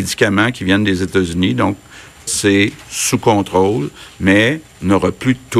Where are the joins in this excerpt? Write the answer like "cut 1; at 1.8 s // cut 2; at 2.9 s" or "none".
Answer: cut 1; at 2.3 s // cut 2; at 4.7 s